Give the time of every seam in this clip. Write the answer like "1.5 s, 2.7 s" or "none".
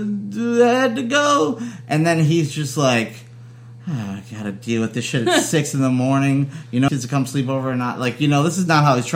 6.9 s